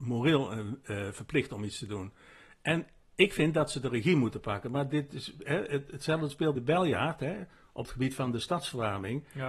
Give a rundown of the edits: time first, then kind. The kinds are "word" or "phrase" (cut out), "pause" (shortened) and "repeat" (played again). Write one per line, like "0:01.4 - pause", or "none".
0:06.6 - word